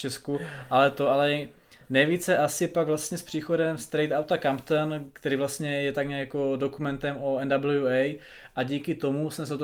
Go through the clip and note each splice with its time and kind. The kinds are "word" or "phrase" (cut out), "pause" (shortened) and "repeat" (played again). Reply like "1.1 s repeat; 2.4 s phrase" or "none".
none